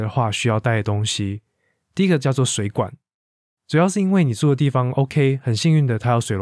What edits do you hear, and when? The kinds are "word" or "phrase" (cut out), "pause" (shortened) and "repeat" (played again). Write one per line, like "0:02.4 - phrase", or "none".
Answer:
none